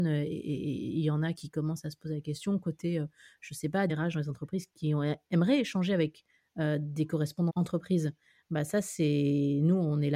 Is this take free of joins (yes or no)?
no